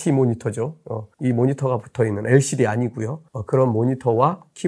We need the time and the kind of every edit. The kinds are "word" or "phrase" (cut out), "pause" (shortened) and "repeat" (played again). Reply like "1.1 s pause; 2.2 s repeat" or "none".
1.1 s pause; 3.3 s pause